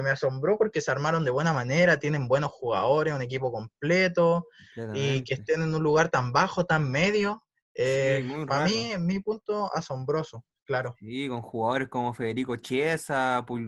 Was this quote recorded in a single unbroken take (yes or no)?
yes